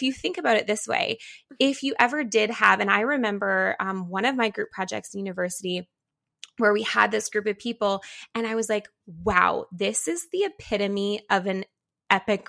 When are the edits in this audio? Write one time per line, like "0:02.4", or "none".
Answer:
none